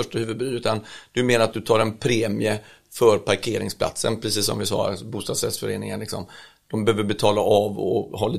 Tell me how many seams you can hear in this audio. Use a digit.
0